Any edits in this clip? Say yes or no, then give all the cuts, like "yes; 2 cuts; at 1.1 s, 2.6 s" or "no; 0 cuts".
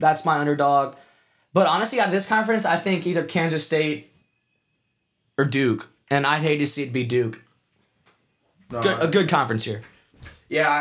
no; 0 cuts